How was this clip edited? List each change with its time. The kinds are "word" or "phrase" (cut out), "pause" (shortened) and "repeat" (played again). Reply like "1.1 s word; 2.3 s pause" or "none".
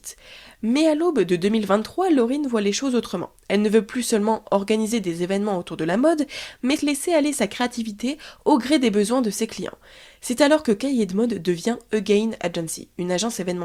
6.8 s word